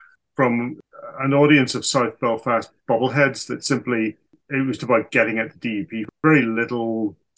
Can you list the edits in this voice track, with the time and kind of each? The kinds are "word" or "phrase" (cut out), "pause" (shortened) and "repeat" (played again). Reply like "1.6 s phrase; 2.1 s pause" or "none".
4.8 s word